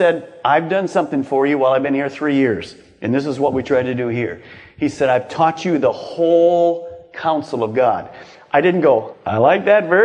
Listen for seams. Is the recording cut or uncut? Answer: uncut